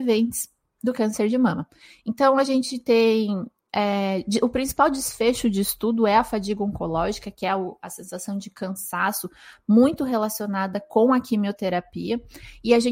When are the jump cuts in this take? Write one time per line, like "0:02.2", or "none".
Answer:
none